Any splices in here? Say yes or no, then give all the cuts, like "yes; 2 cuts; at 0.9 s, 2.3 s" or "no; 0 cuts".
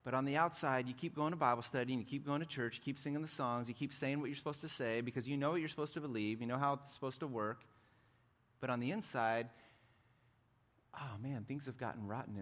no; 0 cuts